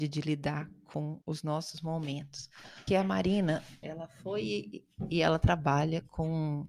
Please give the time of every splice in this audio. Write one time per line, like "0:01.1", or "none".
0:01.2
0:02.9
0:03.8